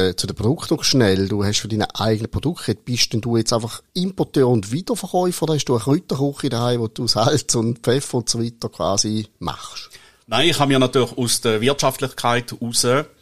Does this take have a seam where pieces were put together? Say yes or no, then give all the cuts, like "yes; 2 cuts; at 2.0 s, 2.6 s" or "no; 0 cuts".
no; 0 cuts